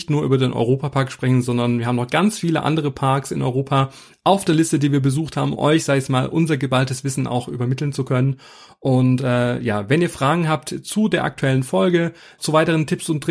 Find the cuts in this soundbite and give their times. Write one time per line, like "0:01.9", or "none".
0:05.5
0:12.4